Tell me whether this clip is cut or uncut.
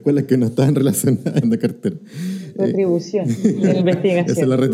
cut